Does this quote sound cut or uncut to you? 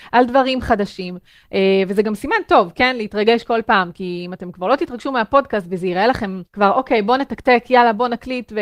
cut